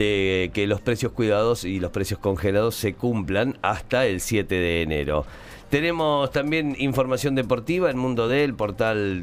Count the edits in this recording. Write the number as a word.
zero